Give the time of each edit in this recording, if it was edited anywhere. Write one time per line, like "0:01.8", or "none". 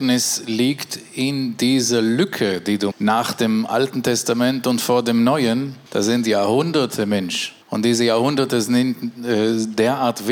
0:02.9
0:05.9
0:07.6